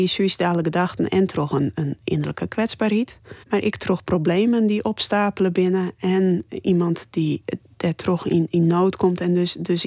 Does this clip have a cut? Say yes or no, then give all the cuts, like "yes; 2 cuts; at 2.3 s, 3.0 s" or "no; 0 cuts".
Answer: yes; 1 cut; at 3.4 s